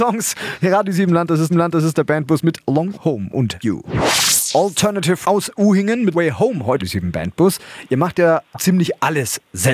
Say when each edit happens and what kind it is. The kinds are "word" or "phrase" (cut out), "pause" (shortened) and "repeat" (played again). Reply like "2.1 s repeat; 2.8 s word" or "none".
1.5 s repeat; 3.0 s word; 3.6 s word; 5.2 s word; 6.1 s word; 6.8 s phrase; 8.5 s word